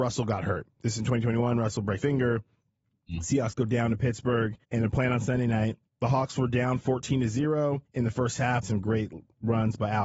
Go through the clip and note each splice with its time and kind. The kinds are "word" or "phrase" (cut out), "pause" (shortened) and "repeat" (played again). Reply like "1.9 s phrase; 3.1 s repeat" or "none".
2.0 s word; 4.6 s pause; 5.9 s pause; 7.9 s pause; 8.6 s phrase